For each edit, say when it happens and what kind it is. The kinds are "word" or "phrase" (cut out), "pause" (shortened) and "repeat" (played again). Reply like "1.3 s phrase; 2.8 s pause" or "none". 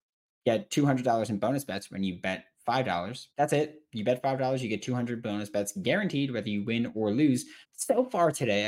3.3 s pause; 7.6 s pause